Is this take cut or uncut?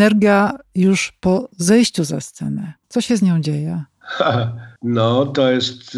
cut